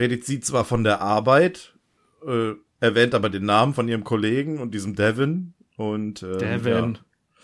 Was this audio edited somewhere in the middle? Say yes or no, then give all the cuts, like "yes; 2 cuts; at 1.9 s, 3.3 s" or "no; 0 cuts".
no; 0 cuts